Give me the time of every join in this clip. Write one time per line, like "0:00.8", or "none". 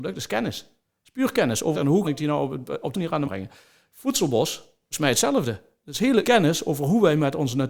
0:01.7
0:02.0
0:02.9
0:03.2
0:04.9
0:06.2

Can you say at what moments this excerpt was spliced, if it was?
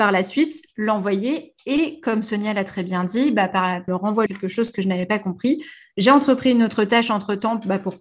0:03.9
0:04.3

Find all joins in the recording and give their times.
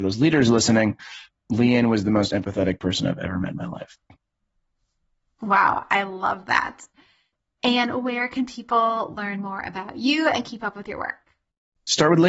none

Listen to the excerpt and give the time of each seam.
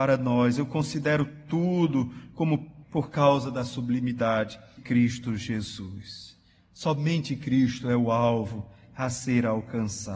0:02.8
0:04.8

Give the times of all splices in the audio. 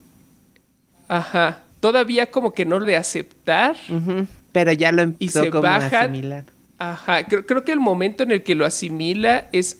0:01.7
0:02.8
0:04.4
0:05.3
0:06.7

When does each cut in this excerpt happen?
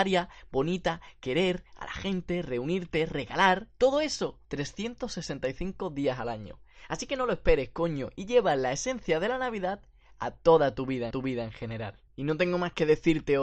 0:04.4
0:11.1
0:12.1

